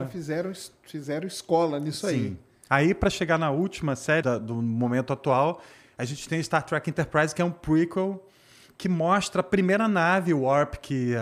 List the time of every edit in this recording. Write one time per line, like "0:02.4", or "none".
0:04.2

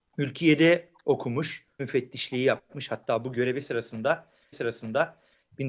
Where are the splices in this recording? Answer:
0:01.8
0:04.5

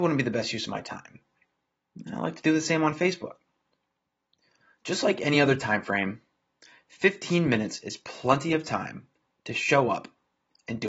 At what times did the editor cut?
none

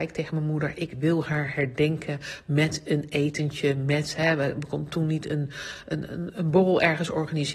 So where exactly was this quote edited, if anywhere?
none

